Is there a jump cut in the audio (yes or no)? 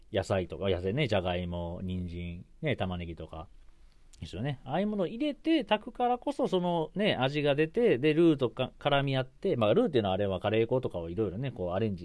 no